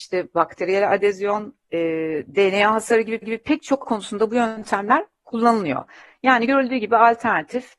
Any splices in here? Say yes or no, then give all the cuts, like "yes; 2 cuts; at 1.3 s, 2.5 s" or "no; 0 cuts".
yes; 2 cuts; at 3.2 s, 3.8 s